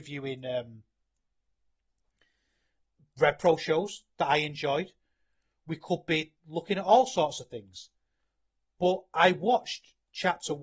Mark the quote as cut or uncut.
uncut